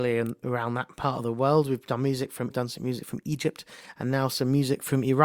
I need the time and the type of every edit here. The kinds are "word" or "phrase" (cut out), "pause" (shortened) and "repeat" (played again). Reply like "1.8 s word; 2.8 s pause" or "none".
2.5 s word